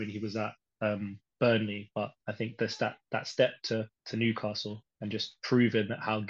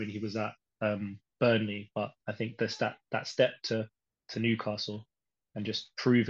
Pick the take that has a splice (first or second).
first